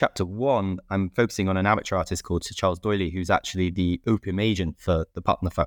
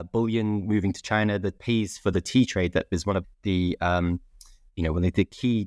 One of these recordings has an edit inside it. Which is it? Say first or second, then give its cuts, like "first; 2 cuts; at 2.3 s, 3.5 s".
second; 2 cuts; at 1.6 s, 3.2 s